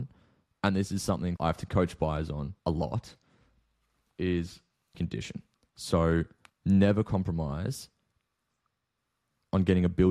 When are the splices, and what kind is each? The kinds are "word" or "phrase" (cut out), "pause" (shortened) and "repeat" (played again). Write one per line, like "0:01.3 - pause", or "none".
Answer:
0:01.4 - word
0:02.6 - pause
0:04.9 - word
0:06.5 - pause